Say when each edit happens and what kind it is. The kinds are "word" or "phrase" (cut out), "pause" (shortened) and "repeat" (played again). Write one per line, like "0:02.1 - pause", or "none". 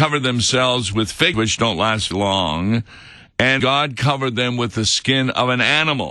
0:01.3 - word
0:02.1 - word
0:03.6 - word